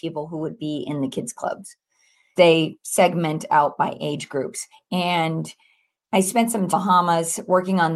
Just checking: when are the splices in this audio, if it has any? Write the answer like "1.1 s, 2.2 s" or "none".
2.4 s, 4.7 s, 6.7 s